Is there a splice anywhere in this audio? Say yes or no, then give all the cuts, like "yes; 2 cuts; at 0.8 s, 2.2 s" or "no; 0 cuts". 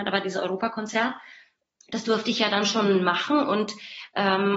yes; 1 cut; at 1.6 s